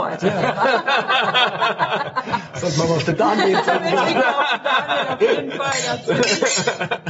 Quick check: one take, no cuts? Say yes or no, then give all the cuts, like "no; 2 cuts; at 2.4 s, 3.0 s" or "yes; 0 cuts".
yes; 0 cuts